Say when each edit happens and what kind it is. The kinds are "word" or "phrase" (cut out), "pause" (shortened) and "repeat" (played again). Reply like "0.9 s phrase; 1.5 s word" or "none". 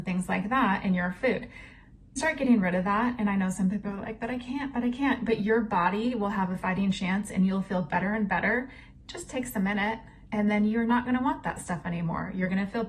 2.2 s phrase

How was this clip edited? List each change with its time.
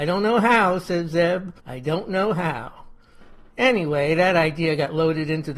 1.6 s pause

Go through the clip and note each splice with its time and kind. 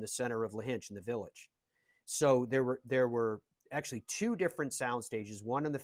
none

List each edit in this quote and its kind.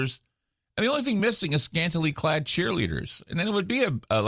none

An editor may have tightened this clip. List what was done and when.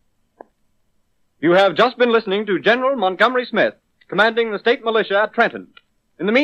none

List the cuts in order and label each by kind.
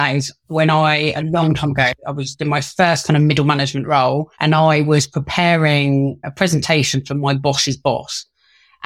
1.1 s word; 4.3 s pause

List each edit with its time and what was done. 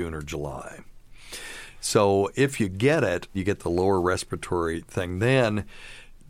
3.3 s word

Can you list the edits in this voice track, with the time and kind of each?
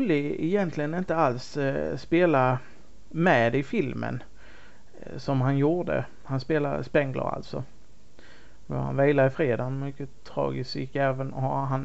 none

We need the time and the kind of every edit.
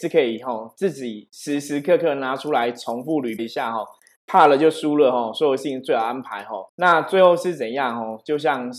3.4 s word; 6.7 s pause

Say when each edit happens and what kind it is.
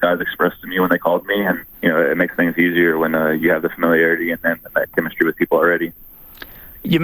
1.7 s pause

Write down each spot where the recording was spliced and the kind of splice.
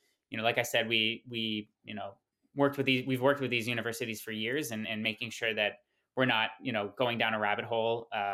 none

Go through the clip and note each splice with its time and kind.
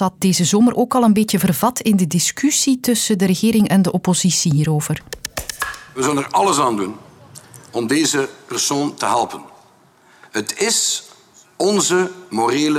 none

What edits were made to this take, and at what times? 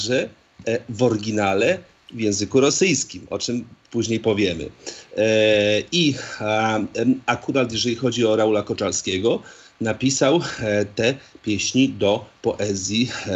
none

